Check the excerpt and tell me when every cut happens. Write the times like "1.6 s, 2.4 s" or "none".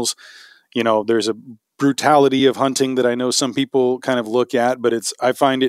none